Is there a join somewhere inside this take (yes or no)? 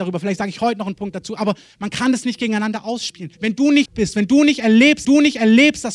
yes